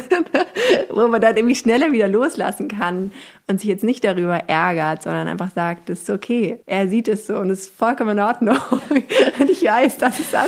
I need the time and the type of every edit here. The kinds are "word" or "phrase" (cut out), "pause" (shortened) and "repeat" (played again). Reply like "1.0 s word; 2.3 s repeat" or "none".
6.6 s pause

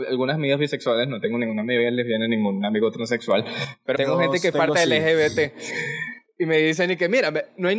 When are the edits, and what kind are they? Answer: 3.9 s word; 4.5 s word

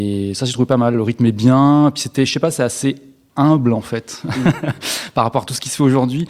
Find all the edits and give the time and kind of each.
none

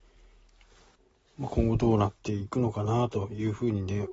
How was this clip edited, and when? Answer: 1.0 s pause

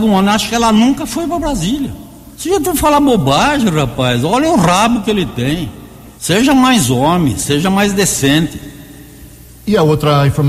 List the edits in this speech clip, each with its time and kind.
2.3 s pause; 6.2 s pause

